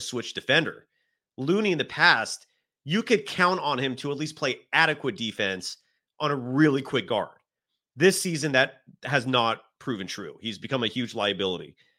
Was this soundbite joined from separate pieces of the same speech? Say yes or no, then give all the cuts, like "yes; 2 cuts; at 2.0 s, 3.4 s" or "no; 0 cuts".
no; 0 cuts